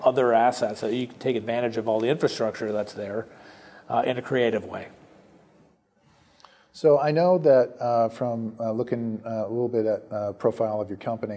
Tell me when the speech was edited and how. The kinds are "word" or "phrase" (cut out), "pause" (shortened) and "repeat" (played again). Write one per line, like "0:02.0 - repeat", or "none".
none